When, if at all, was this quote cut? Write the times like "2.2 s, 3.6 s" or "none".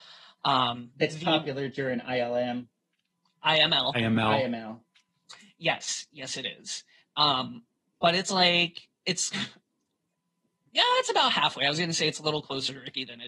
none